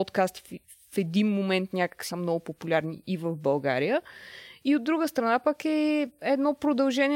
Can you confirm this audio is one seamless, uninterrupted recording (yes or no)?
no